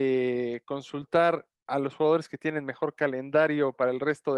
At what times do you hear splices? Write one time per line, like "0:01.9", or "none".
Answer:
0:01.6